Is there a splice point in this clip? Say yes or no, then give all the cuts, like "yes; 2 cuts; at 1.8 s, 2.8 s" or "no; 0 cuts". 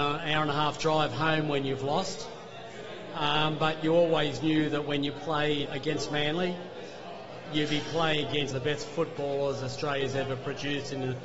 yes; 2 cuts; at 5.7 s, 8.5 s